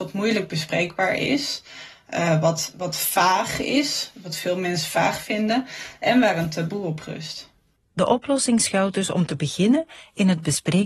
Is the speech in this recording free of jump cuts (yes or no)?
yes